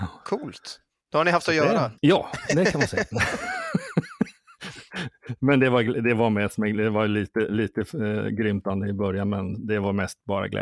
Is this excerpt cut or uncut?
cut